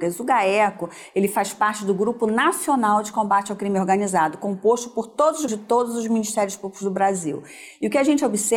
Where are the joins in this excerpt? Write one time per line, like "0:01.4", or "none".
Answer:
0:05.5